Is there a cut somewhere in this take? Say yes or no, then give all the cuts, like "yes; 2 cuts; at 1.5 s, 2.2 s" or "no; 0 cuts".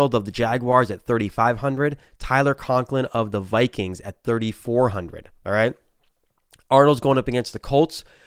no; 0 cuts